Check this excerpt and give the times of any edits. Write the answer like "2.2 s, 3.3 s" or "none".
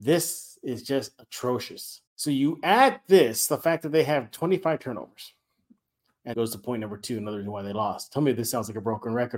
2.1 s, 6.3 s